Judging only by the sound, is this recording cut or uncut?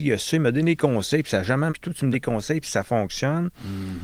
cut